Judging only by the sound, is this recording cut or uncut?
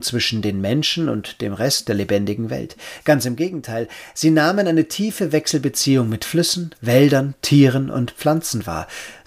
cut